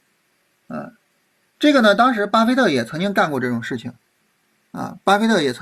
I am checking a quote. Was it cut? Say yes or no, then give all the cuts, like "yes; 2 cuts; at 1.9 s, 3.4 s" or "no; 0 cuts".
no; 0 cuts